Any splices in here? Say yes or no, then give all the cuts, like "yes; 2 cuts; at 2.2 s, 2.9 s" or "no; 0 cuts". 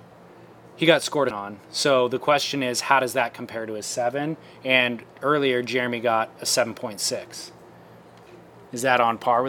yes; 1 cut; at 1.3 s